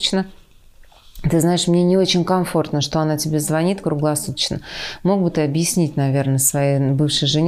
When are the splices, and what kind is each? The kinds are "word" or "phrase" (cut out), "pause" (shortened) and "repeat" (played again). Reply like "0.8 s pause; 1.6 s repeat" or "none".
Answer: none